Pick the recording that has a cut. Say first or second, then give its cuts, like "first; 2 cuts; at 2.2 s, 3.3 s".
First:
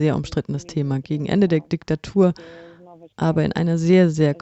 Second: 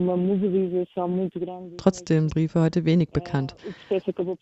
second; 1 cut; at 2.3 s